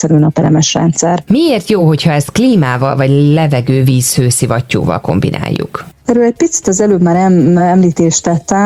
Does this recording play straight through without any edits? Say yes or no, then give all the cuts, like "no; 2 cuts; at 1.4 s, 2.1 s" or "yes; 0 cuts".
yes; 0 cuts